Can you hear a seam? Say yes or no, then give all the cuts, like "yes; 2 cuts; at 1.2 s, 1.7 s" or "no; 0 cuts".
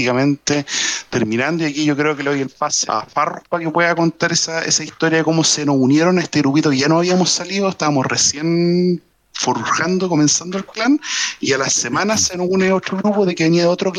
yes; 1 cut; at 2.9 s